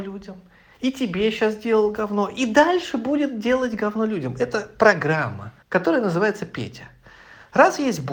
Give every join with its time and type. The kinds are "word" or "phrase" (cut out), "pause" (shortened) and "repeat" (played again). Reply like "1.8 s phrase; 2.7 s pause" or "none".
5.6 s pause